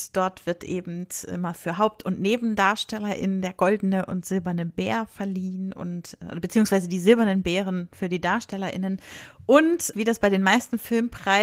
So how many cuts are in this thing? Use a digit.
1